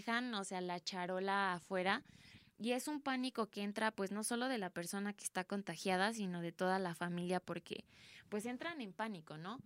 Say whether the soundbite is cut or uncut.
uncut